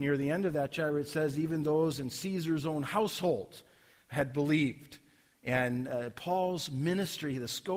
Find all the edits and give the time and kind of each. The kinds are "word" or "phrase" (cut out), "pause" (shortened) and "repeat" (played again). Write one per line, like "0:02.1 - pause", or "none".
none

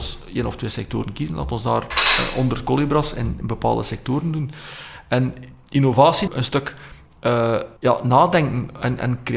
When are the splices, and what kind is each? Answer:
0:06.3 - phrase
0:07.8 - pause

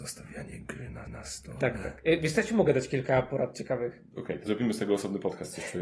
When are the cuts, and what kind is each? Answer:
0:01.1 - repeat
0:04.5 - word

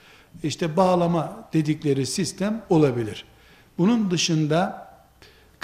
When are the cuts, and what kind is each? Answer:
none

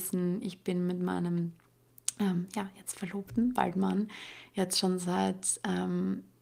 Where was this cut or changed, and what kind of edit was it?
none

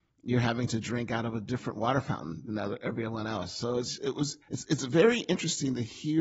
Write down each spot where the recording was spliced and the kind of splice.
0:04.4 - pause

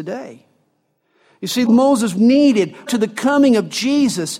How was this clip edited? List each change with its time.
0:01.7 - word
0:02.2 - word
0:02.9 - word

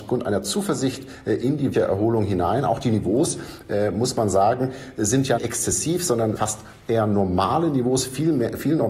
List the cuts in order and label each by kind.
0:01.7 - word
0:05.4 - word
0:06.4 - word

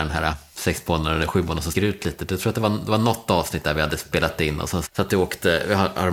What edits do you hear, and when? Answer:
0:01.7 - word
0:04.9 - word

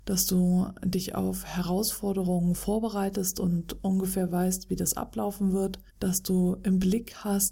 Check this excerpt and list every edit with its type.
0:05.9 - pause

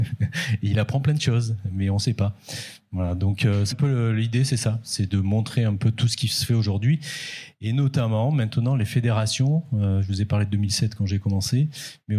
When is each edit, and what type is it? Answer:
0:03.7 - word

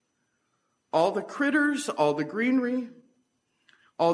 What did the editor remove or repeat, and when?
none

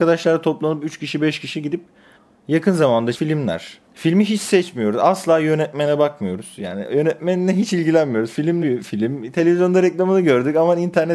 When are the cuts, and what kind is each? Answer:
0:02.2 - pause
0:03.1 - word
0:03.8 - pause
0:08.6 - phrase

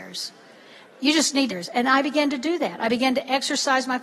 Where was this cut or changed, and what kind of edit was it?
0:01.5 - phrase

